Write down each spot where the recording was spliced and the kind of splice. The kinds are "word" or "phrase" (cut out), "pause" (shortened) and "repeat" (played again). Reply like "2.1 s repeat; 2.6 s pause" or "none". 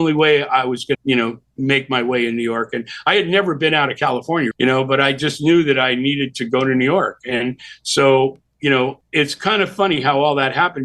0.9 s word; 4.5 s word